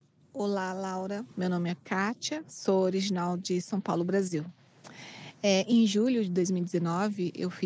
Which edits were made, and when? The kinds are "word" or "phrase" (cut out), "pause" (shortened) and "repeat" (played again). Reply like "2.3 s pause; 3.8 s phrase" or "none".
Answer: 1.3 s pause